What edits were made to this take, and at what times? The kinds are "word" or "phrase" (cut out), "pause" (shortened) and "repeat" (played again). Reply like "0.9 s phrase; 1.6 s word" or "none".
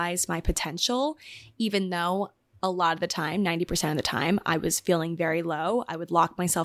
none